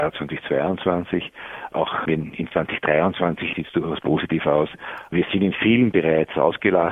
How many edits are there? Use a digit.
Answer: 3